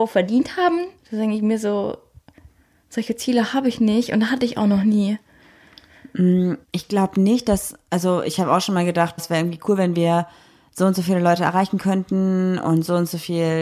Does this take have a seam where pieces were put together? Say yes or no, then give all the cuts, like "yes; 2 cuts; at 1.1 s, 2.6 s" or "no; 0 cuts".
yes; 3 cuts; at 1.0 s, 6.6 s, 9.2 s